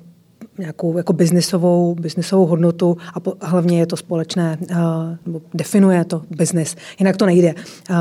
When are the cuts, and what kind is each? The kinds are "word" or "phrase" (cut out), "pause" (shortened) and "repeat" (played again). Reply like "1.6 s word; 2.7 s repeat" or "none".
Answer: none